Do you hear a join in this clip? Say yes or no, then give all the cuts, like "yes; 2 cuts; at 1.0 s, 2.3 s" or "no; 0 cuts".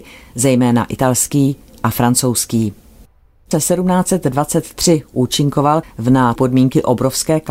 yes; 3 cuts; at 3.5 s, 5.8 s, 6.4 s